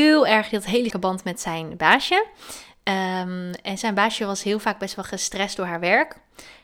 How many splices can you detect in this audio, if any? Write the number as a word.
one